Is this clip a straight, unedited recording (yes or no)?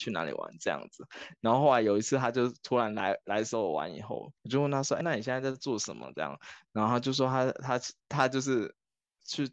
no